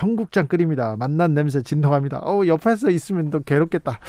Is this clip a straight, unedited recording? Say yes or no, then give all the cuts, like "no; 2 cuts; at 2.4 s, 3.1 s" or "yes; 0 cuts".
yes; 0 cuts